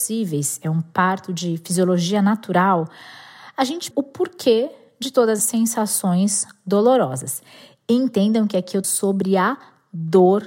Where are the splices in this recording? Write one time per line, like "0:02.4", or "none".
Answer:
0:03.9
0:05.4
0:08.8